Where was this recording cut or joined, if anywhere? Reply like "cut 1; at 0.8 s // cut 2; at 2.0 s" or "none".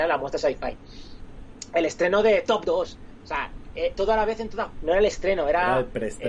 cut 1; at 2.6 s // cut 2; at 3.9 s // cut 3; at 4.7 s

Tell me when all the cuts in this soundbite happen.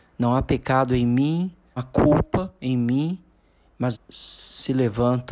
cut 1; at 1.8 s // cut 2; at 2.6 s // cut 3; at 3.9 s

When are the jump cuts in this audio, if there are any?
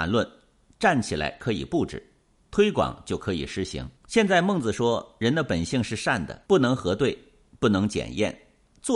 cut 1; at 4.0 s // cut 2; at 6.4 s

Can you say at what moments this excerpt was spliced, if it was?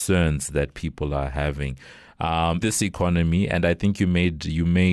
cut 1; at 2.6 s

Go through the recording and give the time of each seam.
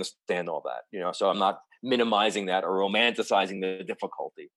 none

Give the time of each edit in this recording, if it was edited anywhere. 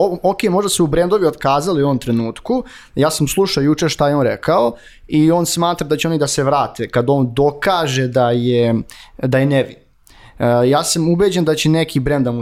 none

